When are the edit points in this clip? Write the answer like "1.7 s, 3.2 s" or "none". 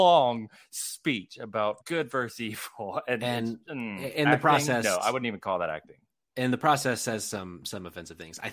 1.8 s, 3.6 s